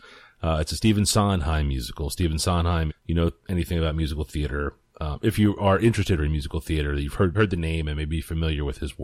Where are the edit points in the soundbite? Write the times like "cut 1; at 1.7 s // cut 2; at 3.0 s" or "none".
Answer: cut 1; at 2.9 s // cut 2; at 6.2 s // cut 3; at 7.3 s